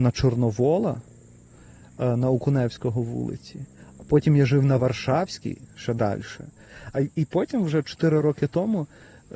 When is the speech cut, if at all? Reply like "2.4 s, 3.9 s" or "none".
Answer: none